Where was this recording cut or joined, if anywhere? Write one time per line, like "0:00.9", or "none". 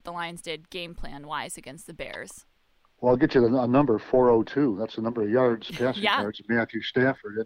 none